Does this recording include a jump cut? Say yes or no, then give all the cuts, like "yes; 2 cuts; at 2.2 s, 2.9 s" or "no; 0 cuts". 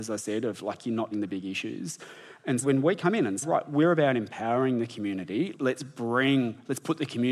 yes; 4 cuts; at 1.1 s, 2.6 s, 3.4 s, 5.5 s